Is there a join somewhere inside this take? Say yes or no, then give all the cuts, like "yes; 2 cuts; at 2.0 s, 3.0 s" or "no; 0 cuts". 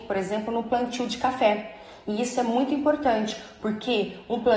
no; 0 cuts